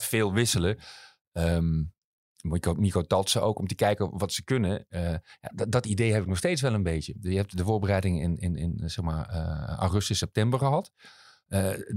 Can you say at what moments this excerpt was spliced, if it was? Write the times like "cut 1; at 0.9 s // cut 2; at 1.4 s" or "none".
none